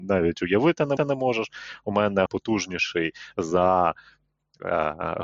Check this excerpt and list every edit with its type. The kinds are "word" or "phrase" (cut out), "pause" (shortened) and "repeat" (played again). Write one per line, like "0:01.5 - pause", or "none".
0:01.0 - repeat
0:02.3 - word